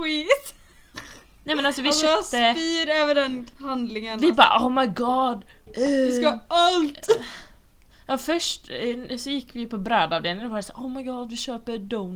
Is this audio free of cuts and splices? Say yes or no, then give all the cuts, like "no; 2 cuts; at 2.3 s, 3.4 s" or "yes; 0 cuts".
yes; 0 cuts